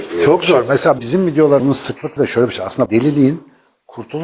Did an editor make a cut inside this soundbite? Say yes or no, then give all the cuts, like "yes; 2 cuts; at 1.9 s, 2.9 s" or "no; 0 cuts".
yes; 4 cuts; at 1.0 s, 1.6 s, 2.2 s, 2.9 s